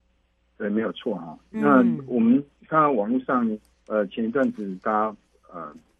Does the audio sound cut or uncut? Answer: cut